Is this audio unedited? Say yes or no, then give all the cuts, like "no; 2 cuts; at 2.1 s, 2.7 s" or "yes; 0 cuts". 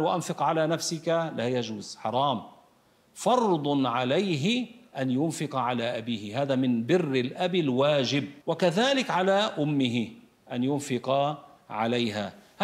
no; 1 cut; at 8.4 s